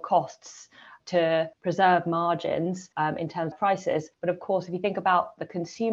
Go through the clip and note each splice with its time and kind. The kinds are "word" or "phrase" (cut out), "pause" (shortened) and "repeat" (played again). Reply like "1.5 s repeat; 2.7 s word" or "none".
1.0 s word; 1.5 s pause; 2.9 s pause; 3.5 s phrase; 4.1 s pause